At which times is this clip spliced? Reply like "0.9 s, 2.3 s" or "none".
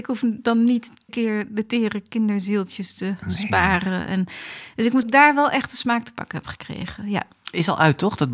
1.1 s, 5.0 s

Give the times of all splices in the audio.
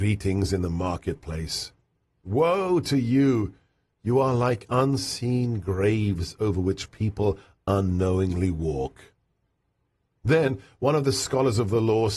none

